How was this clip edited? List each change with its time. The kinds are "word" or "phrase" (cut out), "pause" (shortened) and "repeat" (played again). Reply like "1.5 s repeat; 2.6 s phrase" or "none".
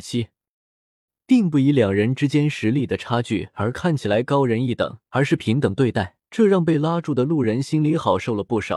5.1 s pause; 6.2 s pause